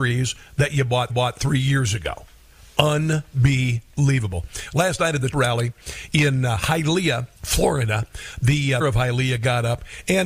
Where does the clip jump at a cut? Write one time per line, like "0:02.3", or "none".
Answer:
0:01.1
0:05.3
0:07.3
0:08.8